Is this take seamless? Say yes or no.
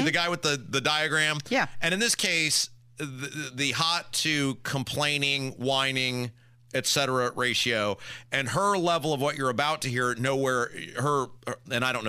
yes